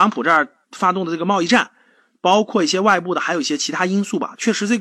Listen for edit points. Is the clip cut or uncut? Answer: uncut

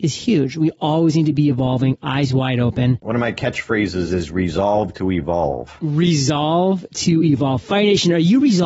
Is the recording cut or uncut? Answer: uncut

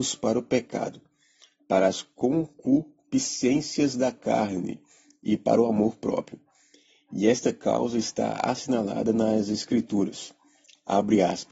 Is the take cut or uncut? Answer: uncut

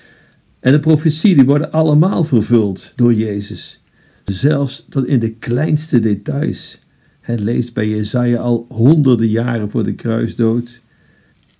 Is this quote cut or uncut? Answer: uncut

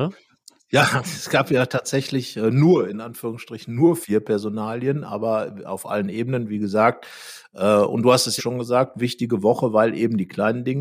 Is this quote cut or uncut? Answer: cut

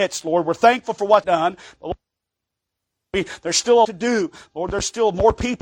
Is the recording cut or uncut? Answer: cut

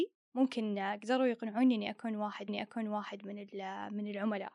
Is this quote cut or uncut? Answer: cut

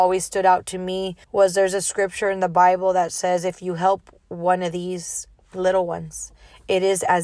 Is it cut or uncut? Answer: cut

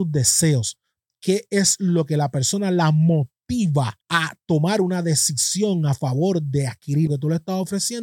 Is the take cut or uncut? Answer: cut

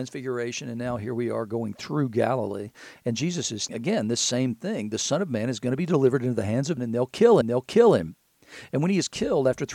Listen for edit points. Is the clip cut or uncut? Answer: cut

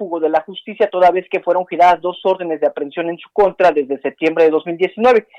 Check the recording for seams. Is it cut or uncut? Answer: uncut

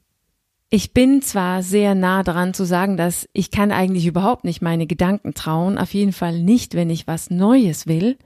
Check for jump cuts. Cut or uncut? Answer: uncut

